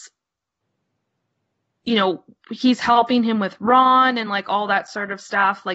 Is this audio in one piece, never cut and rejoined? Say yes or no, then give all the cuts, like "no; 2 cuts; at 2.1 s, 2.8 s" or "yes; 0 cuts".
yes; 0 cuts